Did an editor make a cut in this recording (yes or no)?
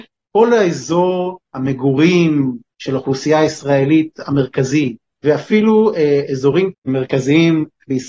yes